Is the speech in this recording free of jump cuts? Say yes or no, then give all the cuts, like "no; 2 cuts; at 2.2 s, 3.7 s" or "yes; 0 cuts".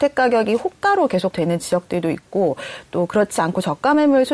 no; 1 cut; at 1.3 s